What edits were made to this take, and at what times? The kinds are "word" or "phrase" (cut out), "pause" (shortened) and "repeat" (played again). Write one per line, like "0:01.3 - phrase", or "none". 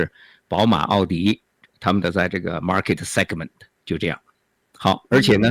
none